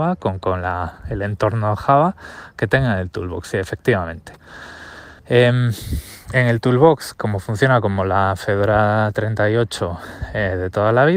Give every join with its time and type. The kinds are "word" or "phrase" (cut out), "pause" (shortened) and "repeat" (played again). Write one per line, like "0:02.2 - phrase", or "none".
0:05.2 - pause